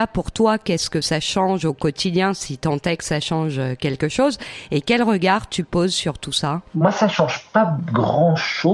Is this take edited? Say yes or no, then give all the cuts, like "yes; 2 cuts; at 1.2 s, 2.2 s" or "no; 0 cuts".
no; 0 cuts